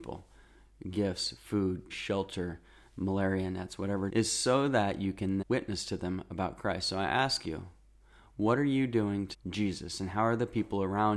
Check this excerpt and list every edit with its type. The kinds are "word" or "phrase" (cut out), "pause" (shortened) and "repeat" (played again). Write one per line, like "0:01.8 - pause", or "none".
0:01.9 - word
0:04.1 - word
0:05.4 - word
0:09.3 - word